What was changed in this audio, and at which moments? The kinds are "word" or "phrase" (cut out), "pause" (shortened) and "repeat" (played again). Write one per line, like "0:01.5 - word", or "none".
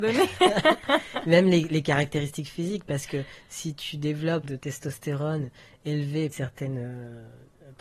0:04.4 - phrase
0:06.3 - phrase